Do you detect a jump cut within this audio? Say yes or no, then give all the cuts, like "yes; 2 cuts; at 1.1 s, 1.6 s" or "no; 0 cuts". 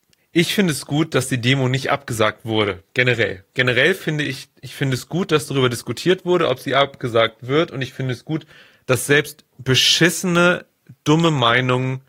no; 0 cuts